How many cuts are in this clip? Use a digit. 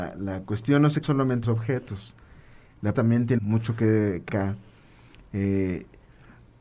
5